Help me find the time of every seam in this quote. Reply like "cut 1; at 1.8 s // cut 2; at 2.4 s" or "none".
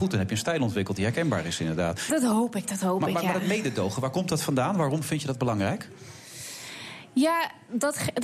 none

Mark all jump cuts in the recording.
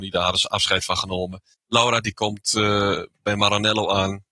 none

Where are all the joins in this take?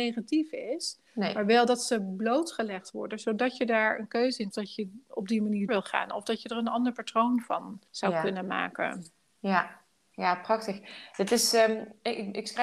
cut 1; at 1.1 s // cut 2; at 4.5 s // cut 3; at 5.7 s // cut 4; at 7.9 s // cut 5; at 9.9 s

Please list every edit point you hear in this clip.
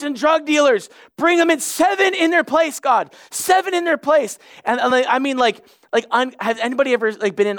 none

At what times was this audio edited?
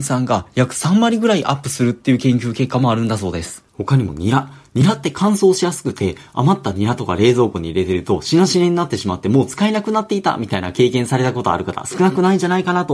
cut 1; at 3.7 s

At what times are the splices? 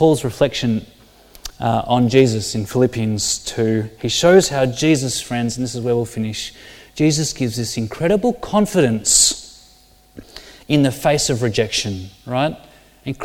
none

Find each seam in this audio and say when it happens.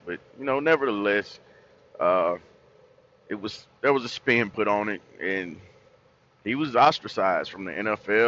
none

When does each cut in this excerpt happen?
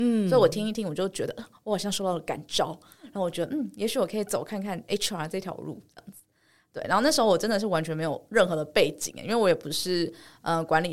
none

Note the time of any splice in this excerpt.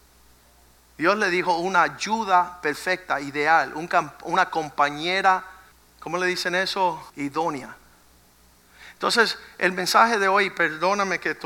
cut 1; at 5.7 s // cut 2; at 7.1 s

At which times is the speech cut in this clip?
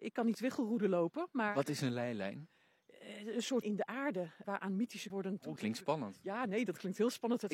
cut 1; at 3.6 s // cut 2; at 4.4 s // cut 3; at 5.1 s // cut 4; at 5.6 s

